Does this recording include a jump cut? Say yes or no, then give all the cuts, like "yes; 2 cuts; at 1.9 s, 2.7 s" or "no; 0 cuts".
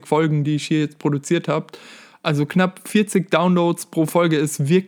no; 0 cuts